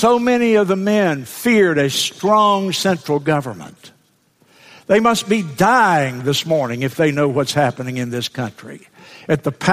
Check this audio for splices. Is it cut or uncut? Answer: uncut